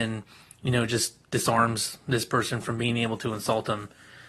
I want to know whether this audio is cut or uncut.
uncut